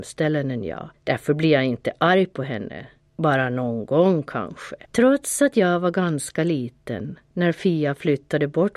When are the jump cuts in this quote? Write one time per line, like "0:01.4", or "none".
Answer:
0:00.9
0:03.0
0:04.8

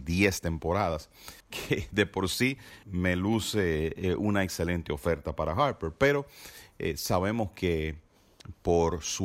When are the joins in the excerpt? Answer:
0:01.4
0:02.8

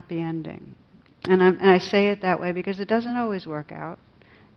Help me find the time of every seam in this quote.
none

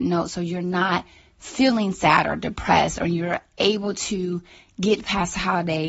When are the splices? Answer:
none

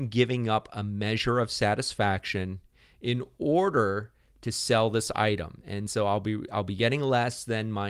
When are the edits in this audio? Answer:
none

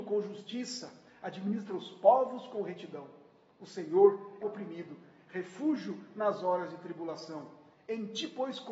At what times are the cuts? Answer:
0:04.4

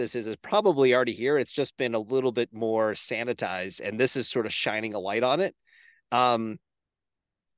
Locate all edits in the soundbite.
none

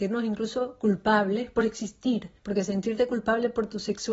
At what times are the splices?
0:02.4

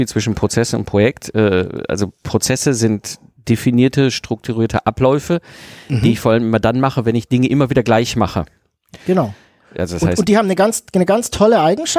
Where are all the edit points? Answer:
none

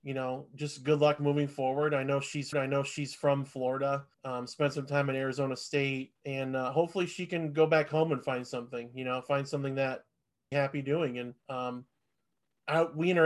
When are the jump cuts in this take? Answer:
0:02.5
0:04.1
0:06.2
0:10.5
0:11.4

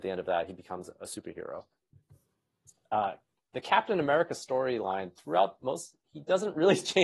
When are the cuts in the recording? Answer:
none

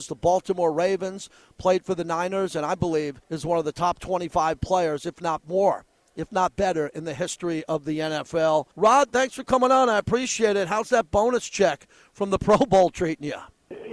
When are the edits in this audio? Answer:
0:03.2
0:08.7

